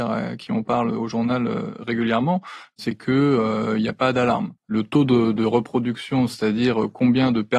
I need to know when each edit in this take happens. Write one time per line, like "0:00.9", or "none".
0:04.6